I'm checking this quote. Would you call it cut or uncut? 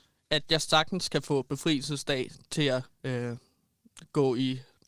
cut